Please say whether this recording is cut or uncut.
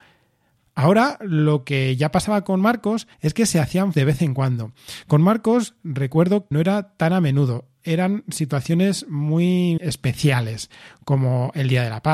cut